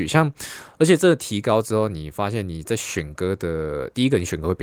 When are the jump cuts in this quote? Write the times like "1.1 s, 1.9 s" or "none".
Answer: none